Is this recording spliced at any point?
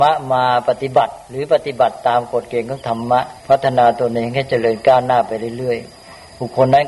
yes; 1 cut; at 3.4 s

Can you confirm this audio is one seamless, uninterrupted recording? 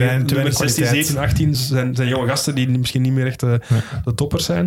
yes; 0 cuts

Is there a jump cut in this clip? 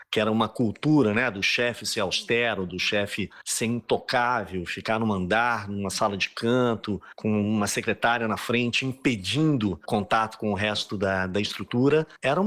no; 0 cuts

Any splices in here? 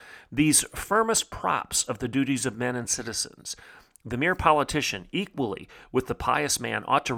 no; 0 cuts

